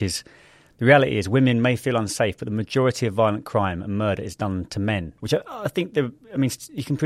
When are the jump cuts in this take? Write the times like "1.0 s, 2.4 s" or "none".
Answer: 5.2 s

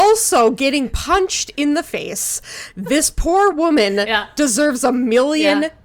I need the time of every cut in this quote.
none

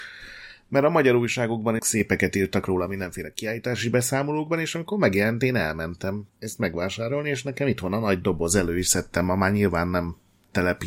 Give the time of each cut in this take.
1.8 s, 6.3 s

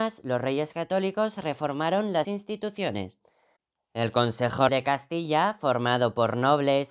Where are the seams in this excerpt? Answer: 2.2 s, 4.7 s

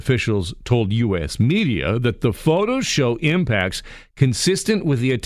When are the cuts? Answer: none

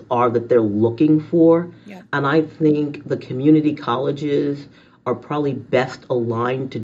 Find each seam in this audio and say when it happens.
none

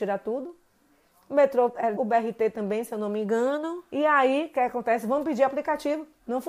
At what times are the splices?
2.0 s, 3.9 s

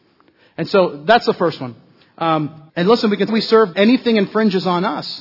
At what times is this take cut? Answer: 2.7 s, 3.3 s, 3.7 s

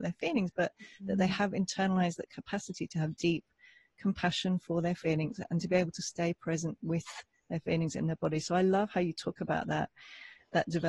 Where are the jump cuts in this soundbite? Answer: none

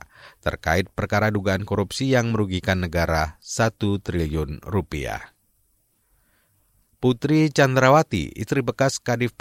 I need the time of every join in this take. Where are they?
none

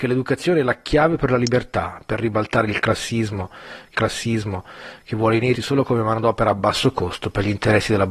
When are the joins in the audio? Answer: 3.9 s, 5.5 s

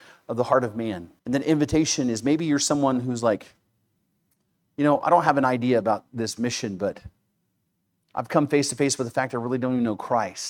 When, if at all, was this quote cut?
1.2 s

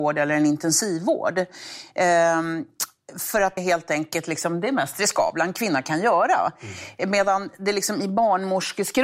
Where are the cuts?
3.6 s

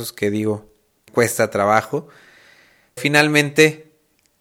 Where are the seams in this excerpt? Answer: 1.1 s, 3.0 s

